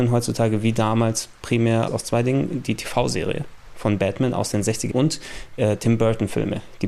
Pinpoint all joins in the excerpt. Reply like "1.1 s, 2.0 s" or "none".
1.9 s, 4.9 s, 5.6 s